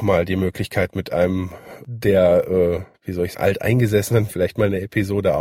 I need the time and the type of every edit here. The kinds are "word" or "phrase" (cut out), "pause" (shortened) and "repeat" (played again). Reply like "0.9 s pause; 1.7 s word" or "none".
2.9 s pause; 3.3 s word; 4.3 s word